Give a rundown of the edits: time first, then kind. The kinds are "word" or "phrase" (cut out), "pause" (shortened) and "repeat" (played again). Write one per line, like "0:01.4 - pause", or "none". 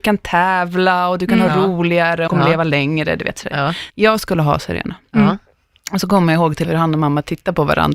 0:02.3 - word
0:03.9 - word
0:06.6 - word